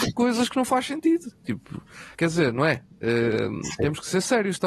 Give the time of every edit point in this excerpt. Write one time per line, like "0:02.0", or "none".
0:02.1